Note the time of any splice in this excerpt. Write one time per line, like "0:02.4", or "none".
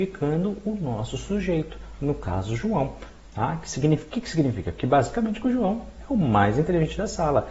none